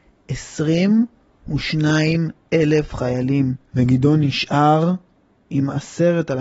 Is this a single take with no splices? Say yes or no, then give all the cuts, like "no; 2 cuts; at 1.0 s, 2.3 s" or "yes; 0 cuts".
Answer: no; 1 cut; at 3.7 s